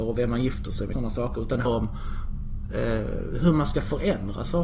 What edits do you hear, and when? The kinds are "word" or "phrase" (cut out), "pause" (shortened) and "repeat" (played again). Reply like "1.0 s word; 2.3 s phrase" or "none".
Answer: 0.9 s word; 1.6 s word; 2.7 s word